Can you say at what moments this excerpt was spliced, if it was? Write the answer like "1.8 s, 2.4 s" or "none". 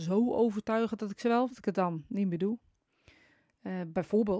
1.5 s